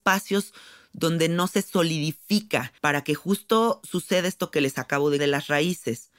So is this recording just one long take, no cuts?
no; 2 cuts; at 2.8 s, 5.2 s

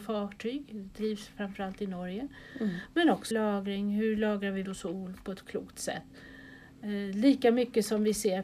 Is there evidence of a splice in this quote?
yes; 2 cuts; at 3.3 s, 4.6 s

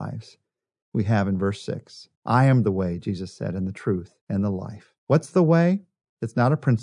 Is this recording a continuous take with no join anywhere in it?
no; 3 cuts; at 2.2 s, 4.2 s, 5.0 s

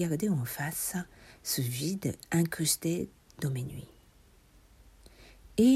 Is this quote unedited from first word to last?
yes; 0 cuts

